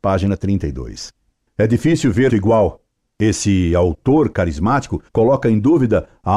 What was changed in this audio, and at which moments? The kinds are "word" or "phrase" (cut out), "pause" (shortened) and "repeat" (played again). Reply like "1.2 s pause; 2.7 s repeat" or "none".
2.3 s word; 5.1 s pause